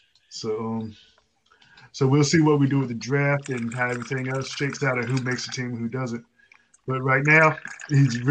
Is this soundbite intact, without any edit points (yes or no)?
yes